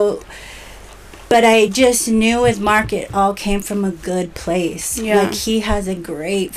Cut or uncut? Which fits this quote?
uncut